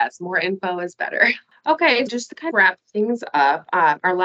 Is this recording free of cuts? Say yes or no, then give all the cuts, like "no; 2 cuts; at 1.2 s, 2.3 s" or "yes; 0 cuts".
no; 2 cuts; at 2.1 s, 2.5 s